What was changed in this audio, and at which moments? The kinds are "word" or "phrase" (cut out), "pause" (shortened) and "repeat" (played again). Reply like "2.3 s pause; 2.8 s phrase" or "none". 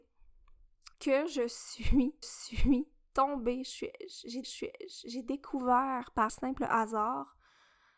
0.9 s pause; 2.2 s repeat; 4.4 s repeat; 6.3 s word